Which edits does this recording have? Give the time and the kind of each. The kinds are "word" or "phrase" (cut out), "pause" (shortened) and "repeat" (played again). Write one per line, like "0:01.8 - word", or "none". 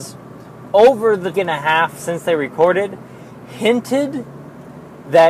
0:01.3 - phrase